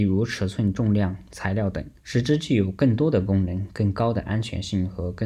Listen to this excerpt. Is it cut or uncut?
cut